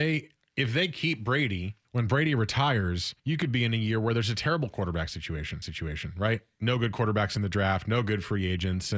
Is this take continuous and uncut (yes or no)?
no